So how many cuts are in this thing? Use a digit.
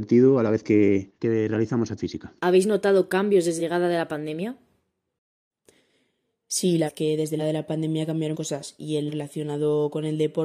8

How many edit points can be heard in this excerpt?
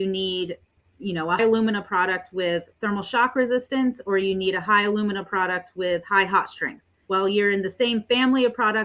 2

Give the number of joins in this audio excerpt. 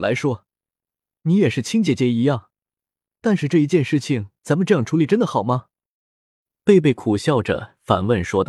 0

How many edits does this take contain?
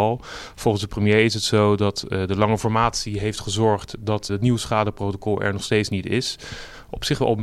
1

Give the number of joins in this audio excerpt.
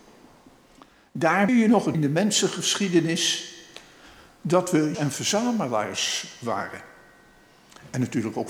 3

